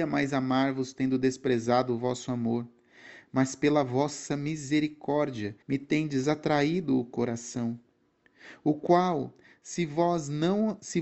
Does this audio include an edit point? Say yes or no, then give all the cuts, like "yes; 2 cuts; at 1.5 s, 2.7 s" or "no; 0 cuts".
yes; 1 cut; at 5.6 s